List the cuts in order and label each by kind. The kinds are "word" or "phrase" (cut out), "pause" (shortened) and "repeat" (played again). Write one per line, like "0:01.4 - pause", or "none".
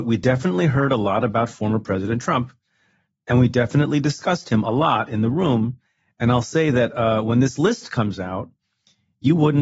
none